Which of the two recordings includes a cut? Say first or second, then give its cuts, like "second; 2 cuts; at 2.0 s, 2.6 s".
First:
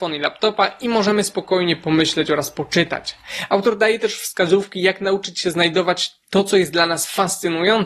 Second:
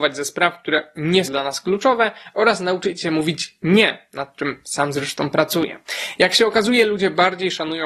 second; 1 cut; at 1.3 s